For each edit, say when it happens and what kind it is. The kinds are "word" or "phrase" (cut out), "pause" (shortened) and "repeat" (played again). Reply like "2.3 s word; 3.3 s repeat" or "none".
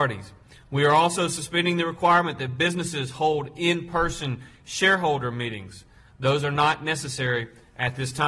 none